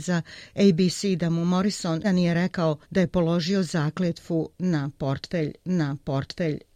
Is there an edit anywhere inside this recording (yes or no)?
yes